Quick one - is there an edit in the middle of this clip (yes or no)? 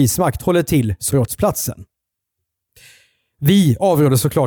yes